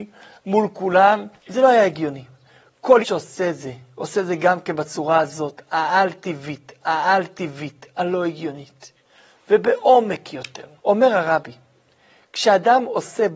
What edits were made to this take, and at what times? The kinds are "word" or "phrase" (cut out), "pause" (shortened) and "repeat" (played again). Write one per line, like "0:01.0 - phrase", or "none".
0:01.4 - pause
0:03.0 - word
0:06.8 - repeat
0:10.8 - pause

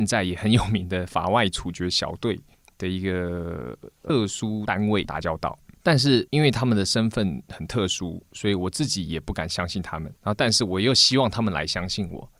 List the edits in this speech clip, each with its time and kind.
0:10.2 - pause

